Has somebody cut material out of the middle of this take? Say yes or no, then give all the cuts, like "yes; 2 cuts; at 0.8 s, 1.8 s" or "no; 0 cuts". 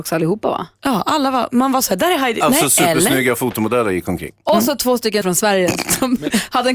yes; 1 cut; at 5.2 s